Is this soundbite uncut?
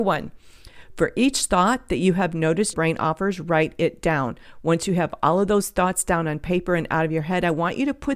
no; 1 cut; at 2.7 s

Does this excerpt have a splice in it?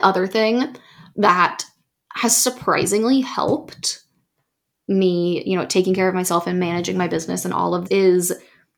yes; 1 cut; at 7.9 s

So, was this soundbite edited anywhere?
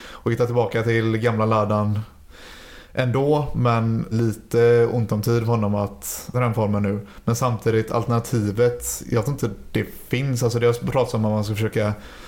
yes; 2 cuts; at 4.1 s, 6.3 s

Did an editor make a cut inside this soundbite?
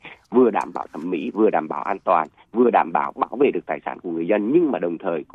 no; 0 cuts

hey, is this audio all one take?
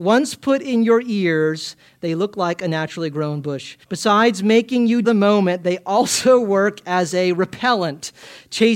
no; 2 cuts; at 3.8 s, 5.0 s

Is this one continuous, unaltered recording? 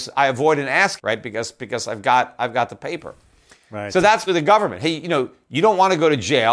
no; 2 cuts; at 1.0 s, 4.3 s

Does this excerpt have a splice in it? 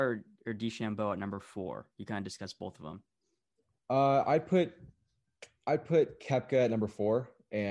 no; 0 cuts

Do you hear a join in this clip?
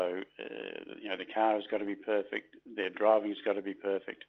no; 0 cuts

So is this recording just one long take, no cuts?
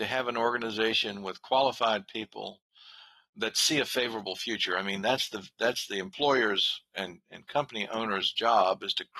yes; 0 cuts

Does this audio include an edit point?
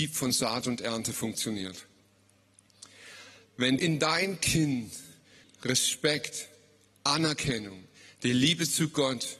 yes; 2 cuts; at 3.8 s, 5.4 s

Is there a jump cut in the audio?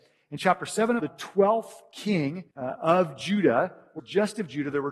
yes; 3 cuts; at 1.0 s, 2.5 s, 4.0 s

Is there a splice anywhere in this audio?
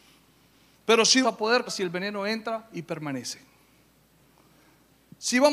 yes; 2 cuts; at 1.2 s, 1.7 s

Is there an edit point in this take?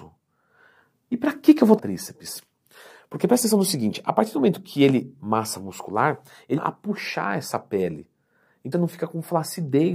yes; 4 cuts; at 1.8 s, 5.2 s, 6.6 s, 8.7 s

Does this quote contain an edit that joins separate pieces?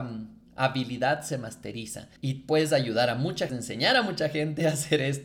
yes; 2 cuts; at 2.2 s, 3.5 s

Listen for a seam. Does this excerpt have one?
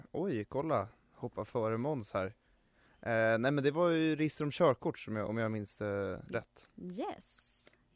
no; 0 cuts

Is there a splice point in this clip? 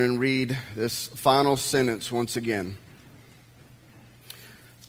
no; 0 cuts

